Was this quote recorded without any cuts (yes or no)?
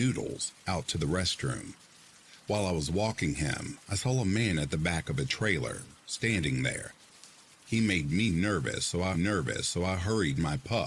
no